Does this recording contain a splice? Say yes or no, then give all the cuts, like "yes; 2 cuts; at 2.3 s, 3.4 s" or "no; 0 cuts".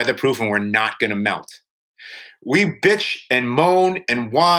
no; 0 cuts